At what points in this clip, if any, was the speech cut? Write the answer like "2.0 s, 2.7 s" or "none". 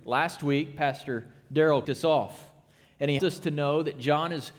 1.8 s, 3.2 s